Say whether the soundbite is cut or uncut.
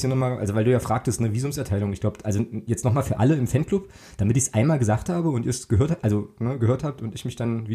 uncut